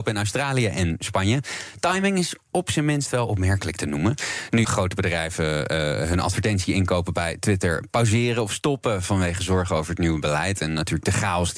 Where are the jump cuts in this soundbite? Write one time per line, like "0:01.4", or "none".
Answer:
0:04.6